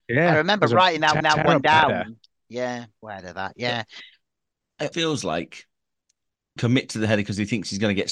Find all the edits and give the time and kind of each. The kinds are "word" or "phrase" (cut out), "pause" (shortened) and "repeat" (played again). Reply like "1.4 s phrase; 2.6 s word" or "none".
1.2 s repeat; 3.0 s phrase; 4.9 s word; 6.6 s phrase